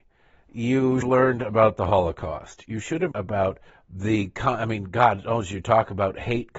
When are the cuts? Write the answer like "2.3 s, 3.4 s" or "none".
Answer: 1.0 s, 3.1 s, 3.7 s